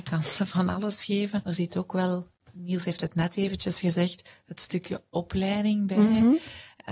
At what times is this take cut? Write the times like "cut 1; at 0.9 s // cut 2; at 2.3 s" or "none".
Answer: cut 1; at 1.4 s